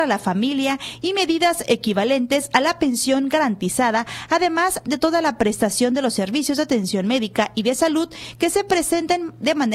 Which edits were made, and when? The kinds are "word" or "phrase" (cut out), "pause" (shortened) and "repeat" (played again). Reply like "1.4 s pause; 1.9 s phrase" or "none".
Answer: none